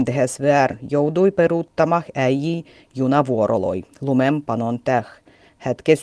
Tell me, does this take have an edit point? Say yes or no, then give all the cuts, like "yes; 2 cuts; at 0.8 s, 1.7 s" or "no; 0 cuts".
no; 0 cuts